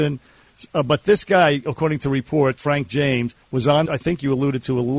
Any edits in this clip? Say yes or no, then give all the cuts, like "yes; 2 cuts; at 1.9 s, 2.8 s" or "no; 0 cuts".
yes; 3 cuts; at 2.6 s, 3.4 s, 3.9 s